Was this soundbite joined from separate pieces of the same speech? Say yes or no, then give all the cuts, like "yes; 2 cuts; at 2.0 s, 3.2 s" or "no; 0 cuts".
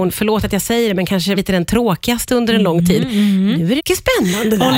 yes; 2 cuts; at 1.4 s, 3.8 s